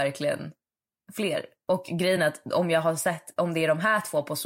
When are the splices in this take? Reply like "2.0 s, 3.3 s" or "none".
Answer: none